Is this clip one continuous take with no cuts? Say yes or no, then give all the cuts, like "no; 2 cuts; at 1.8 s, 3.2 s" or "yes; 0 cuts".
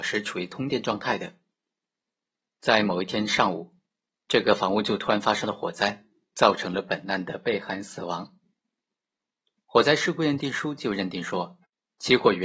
yes; 0 cuts